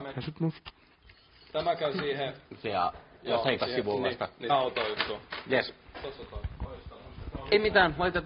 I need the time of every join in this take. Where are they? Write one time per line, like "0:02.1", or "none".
0:02.5
0:03.6
0:04.5